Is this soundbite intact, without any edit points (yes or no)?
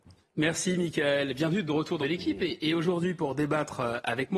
no